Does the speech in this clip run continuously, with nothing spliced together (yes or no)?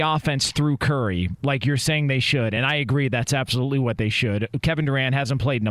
yes